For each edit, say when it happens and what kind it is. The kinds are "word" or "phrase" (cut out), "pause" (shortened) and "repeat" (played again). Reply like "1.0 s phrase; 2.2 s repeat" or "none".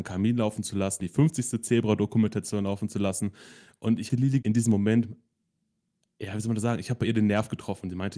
1.0 s word; 4.1 s word; 4.4 s word

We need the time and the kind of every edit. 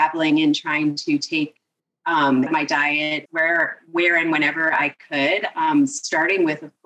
2.5 s phrase; 3.3 s word

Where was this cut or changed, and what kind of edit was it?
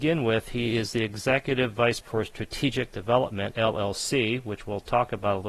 2.0 s word; 3.5 s phrase

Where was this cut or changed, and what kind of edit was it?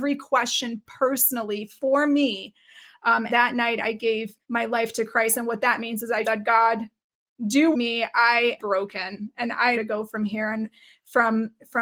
3.3 s word; 4.4 s pause; 6.2 s word; 7.7 s phrase; 8.6 s word; 9.7 s phrase

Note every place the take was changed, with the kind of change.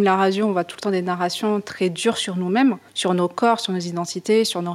2.9 s pause

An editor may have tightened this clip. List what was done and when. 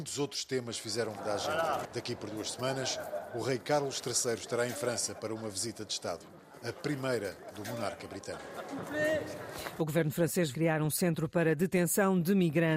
1.2 s word; 10.5 s word

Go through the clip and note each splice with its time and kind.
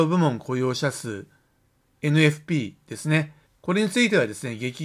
3.5 s pause

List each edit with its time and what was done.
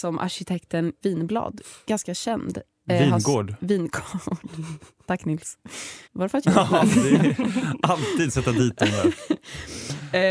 1.0 s word; 6.0 s pause; 6.4 s phrase; 8.3 s word

